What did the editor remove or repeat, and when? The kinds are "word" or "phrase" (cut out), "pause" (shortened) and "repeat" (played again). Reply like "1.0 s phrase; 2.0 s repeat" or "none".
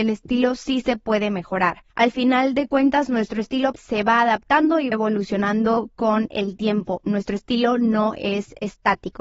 1.9 s pause; 3.7 s word; 4.9 s word